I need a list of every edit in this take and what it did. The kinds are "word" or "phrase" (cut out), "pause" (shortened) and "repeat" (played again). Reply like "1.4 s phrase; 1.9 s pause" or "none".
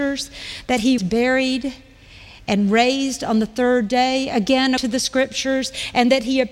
1.0 s word; 4.8 s word